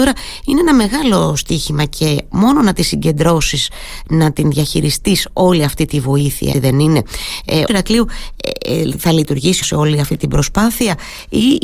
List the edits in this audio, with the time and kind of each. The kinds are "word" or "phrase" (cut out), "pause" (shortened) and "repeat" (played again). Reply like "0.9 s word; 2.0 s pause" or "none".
6.5 s word; 7.7 s phrase; 9.6 s phrase